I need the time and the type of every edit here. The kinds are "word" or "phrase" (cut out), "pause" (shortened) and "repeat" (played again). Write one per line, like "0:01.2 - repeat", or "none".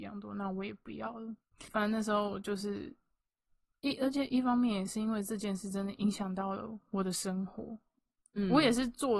0:01.5 - pause